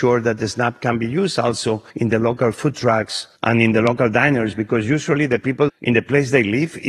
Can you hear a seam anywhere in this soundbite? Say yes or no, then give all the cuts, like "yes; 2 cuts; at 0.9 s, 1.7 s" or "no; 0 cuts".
yes; 3 cuts; at 1.9 s, 3.4 s, 5.7 s